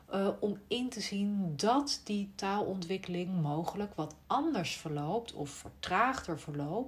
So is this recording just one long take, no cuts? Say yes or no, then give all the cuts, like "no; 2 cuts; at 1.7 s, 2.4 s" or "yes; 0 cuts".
yes; 0 cuts